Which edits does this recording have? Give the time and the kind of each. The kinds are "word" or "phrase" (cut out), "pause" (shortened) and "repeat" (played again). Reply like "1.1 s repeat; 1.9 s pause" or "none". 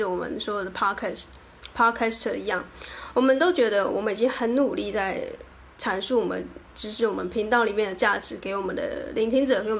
none